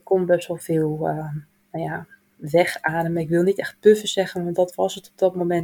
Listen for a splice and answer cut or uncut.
uncut